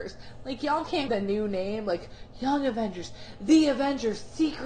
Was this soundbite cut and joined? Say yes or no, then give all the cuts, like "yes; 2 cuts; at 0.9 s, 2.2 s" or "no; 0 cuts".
yes; 1 cut; at 1.1 s